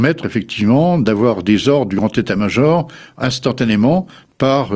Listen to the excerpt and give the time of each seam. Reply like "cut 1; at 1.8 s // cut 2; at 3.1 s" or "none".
none